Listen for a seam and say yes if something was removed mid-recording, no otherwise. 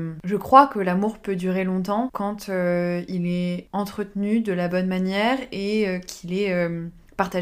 no